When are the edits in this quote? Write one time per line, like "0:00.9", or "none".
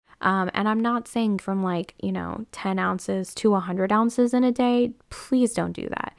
0:01.4